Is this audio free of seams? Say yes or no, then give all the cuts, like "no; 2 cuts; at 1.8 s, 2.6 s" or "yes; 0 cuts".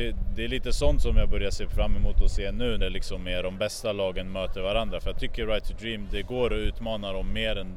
no; 1 cut; at 2.8 s